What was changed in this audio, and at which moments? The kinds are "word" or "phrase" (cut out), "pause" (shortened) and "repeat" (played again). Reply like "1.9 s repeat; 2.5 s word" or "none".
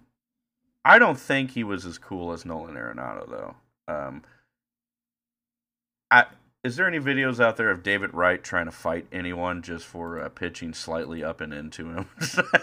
none